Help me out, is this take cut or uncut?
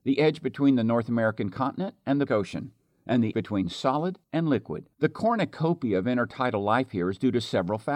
cut